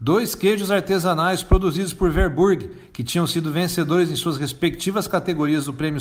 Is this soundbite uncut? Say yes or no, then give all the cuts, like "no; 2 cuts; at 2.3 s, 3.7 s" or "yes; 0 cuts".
yes; 0 cuts